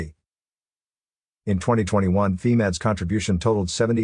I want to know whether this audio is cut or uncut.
uncut